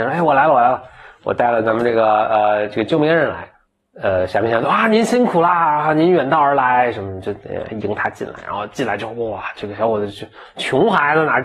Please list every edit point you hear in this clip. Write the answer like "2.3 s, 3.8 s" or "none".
3.5 s